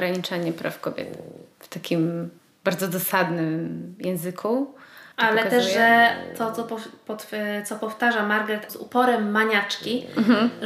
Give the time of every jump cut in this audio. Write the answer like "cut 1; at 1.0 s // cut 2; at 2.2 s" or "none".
cut 1; at 1.5 s // cut 2; at 2.4 s // cut 3; at 5.1 s // cut 4; at 8.7 s

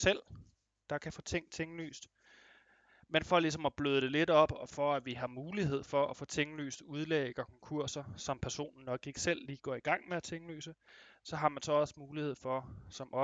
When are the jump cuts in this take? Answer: none

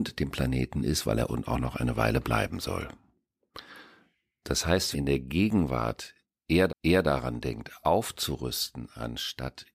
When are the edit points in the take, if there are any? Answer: cut 1; at 1.3 s // cut 2; at 4.9 s // cut 3; at 6.7 s

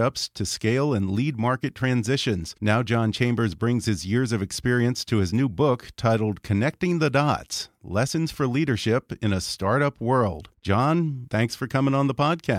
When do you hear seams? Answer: cut 1; at 2.6 s // cut 2; at 10.5 s

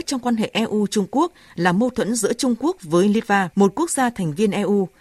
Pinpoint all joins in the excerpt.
cut 1; at 3.5 s

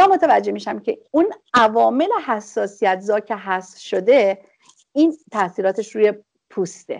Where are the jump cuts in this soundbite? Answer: none

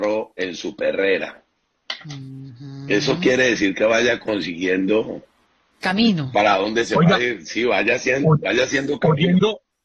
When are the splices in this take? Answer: cut 1; at 5.4 s

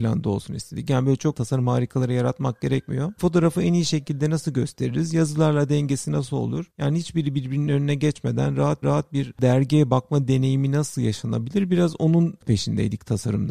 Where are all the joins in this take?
cut 1; at 6.7 s // cut 2; at 8.8 s

